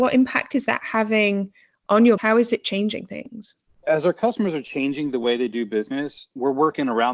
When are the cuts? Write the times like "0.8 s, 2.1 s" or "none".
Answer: 2.2 s, 3.8 s